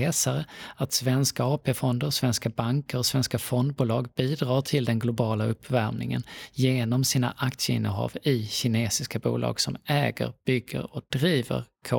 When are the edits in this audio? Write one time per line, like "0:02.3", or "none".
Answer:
none